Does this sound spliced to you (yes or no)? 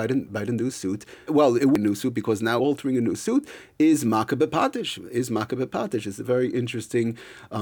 yes